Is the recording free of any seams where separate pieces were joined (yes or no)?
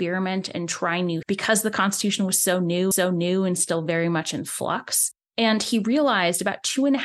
no